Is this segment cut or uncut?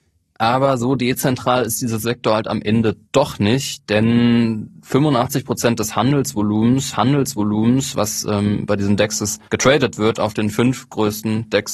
cut